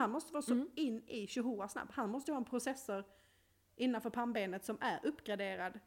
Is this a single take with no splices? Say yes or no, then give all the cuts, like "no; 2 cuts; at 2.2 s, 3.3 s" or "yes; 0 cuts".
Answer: yes; 0 cuts